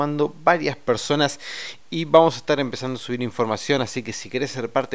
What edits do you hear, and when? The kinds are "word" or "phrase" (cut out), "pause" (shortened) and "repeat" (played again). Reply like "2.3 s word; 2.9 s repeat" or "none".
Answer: none